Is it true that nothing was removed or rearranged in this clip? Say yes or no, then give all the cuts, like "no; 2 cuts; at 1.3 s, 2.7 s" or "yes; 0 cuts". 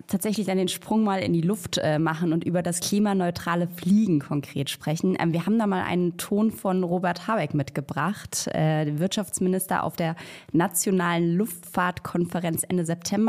yes; 0 cuts